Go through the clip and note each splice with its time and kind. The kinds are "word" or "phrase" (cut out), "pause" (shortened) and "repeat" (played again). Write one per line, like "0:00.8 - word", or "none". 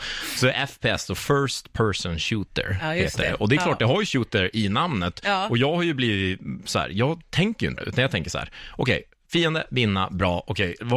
0:07.8 - phrase